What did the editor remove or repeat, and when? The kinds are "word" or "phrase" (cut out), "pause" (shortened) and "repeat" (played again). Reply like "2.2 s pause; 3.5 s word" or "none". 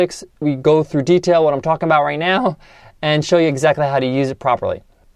none